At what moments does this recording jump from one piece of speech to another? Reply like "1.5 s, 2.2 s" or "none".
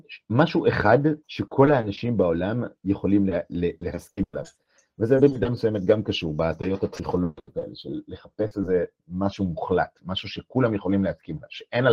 1.2 s